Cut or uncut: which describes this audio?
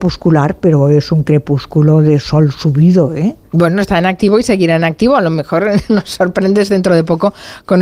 cut